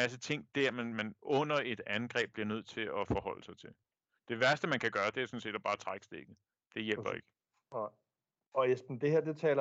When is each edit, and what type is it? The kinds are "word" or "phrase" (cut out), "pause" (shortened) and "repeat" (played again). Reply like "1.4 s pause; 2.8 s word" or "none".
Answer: 6.5 s pause